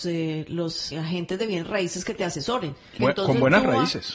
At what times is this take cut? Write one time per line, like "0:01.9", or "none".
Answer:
0:00.9
0:03.0